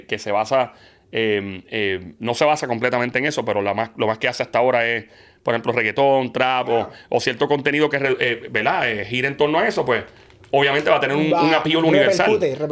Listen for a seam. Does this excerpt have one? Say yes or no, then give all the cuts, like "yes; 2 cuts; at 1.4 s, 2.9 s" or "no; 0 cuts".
no; 0 cuts